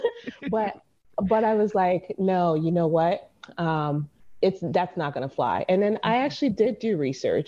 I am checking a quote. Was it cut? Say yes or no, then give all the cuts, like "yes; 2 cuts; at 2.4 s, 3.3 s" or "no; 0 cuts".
no; 0 cuts